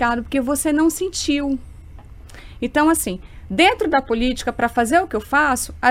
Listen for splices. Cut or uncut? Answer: uncut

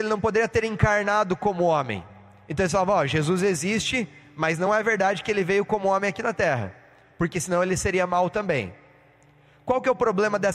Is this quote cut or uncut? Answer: uncut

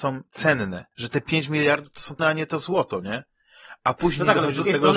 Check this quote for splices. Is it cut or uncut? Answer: cut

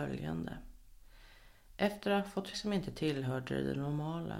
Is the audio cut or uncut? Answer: cut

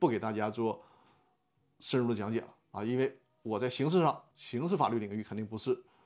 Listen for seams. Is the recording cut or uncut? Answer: cut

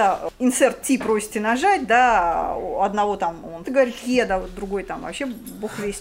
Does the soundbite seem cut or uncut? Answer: cut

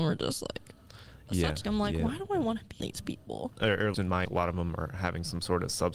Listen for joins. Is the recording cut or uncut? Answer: cut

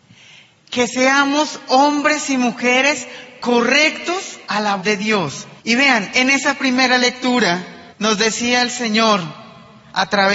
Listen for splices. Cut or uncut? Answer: cut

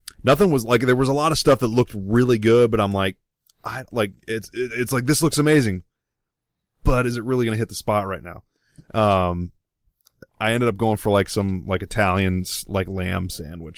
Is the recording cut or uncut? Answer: uncut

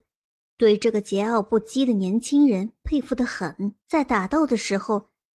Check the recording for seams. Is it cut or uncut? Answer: cut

